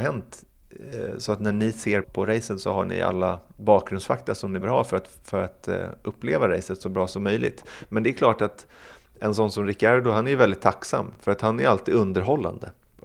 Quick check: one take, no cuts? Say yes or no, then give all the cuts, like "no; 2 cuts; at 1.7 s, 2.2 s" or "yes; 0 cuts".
no; 2 cuts; at 2.0 s, 4.6 s